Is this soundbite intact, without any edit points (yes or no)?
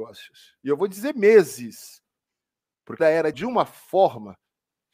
no